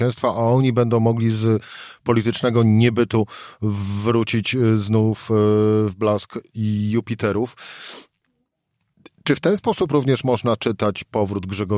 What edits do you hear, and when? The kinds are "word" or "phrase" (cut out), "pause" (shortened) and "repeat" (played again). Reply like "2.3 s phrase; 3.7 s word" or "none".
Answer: none